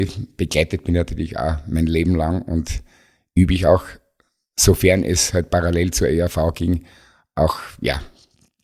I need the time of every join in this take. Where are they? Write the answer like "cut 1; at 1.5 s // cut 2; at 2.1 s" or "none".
none